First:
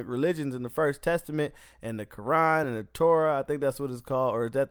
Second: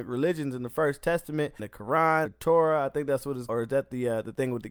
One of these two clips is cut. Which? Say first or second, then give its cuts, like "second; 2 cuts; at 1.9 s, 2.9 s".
second; 3 cuts; at 1.6 s, 2.3 s, 3.5 s